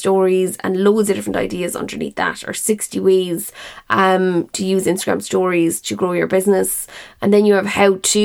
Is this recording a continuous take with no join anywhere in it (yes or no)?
yes